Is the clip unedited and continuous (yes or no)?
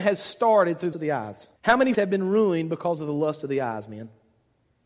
no